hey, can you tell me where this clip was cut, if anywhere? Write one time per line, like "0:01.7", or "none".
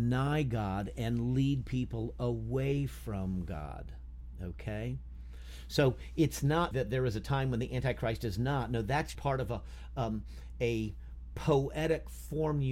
0:06.7
0:09.1